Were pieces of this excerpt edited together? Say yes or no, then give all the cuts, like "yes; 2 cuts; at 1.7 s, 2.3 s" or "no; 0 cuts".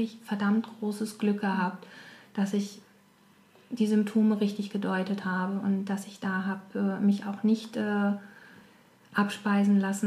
no; 0 cuts